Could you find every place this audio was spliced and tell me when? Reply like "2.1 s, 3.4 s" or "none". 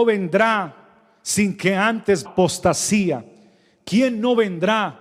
2.2 s